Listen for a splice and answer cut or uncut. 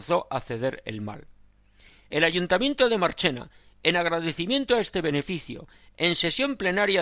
uncut